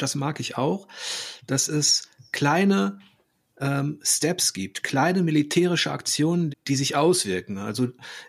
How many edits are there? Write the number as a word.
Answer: one